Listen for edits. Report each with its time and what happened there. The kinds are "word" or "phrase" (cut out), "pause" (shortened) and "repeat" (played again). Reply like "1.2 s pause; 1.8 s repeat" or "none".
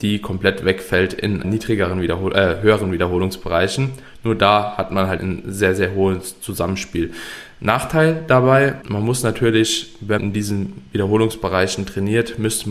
1.4 s word; 5.2 s word; 10.2 s word